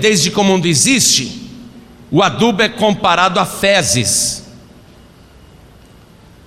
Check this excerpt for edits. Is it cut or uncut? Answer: uncut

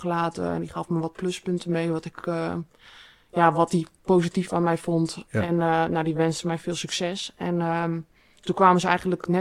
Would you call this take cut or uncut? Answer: uncut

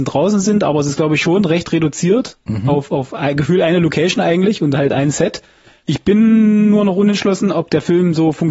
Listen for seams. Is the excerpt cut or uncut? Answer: uncut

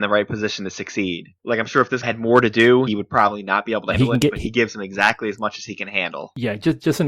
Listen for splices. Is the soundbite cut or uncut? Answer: cut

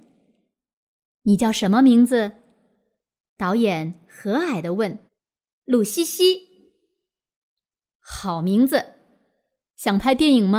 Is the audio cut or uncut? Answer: cut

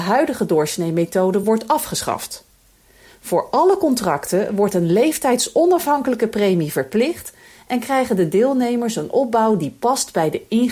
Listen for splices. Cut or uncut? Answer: uncut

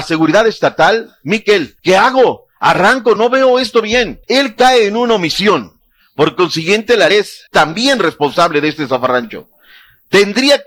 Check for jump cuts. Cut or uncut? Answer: cut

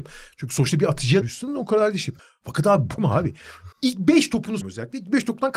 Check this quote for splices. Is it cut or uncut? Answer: cut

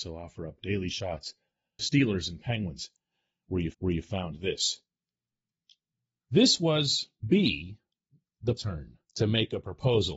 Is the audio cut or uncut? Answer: cut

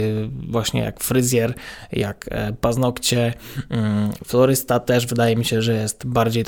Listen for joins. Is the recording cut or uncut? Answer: uncut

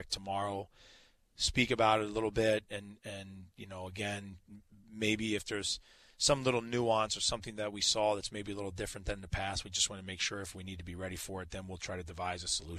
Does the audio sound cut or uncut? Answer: uncut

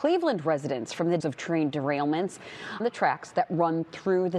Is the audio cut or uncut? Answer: cut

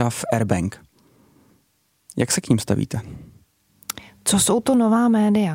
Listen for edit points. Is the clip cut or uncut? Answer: uncut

